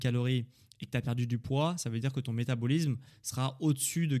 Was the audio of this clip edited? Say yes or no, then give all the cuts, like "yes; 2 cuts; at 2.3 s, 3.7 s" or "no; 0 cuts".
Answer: no; 0 cuts